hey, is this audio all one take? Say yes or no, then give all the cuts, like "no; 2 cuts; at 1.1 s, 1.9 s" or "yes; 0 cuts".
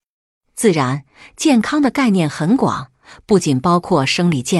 yes; 0 cuts